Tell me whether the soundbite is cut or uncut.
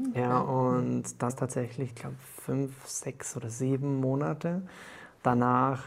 cut